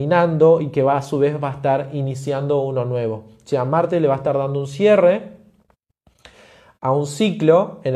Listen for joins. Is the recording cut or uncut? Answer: uncut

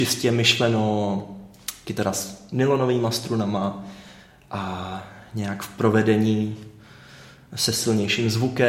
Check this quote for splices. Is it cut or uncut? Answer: uncut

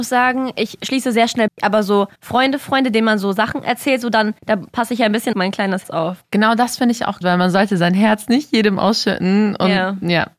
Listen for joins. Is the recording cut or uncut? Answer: cut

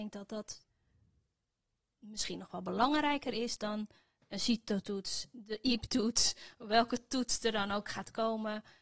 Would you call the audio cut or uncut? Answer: uncut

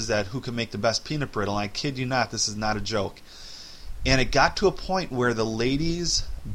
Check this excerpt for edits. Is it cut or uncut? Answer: uncut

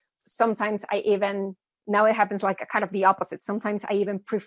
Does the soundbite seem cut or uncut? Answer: uncut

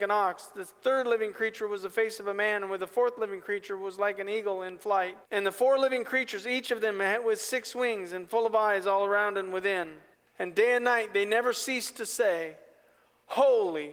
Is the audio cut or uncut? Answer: cut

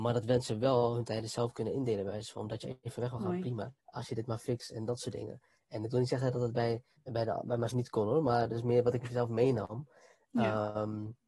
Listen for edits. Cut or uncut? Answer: cut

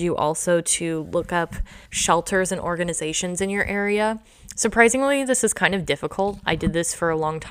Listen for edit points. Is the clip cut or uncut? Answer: cut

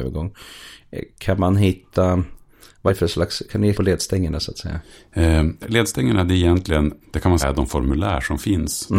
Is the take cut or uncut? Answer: cut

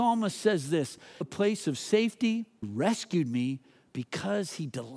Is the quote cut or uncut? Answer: cut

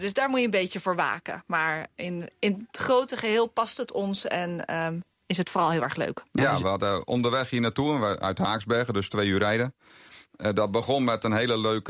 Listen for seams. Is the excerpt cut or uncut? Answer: cut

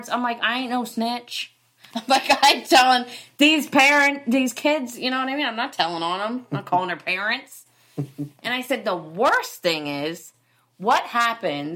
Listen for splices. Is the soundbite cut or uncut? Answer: uncut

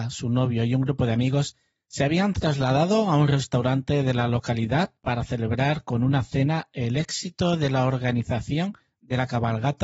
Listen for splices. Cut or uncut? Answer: uncut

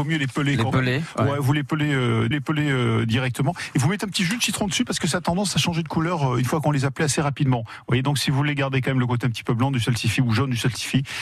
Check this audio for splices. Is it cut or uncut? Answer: cut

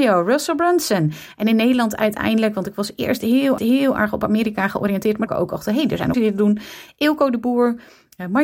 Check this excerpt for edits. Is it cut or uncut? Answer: cut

